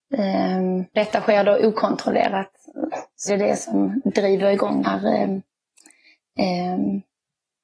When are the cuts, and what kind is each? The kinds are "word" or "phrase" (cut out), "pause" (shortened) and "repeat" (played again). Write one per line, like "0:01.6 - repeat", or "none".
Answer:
0:00.9 - word
0:03.3 - word
0:04.8 - word